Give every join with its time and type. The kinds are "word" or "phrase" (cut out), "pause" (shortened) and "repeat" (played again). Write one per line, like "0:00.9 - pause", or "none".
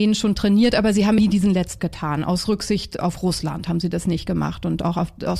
0:01.2 - word
0:01.8 - word